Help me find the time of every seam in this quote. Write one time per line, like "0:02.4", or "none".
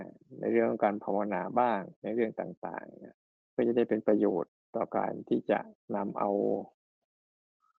0:03.4
0:04.6